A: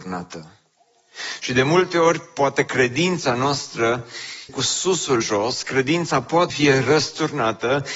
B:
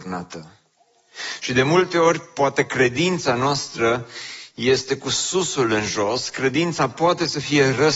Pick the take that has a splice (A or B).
A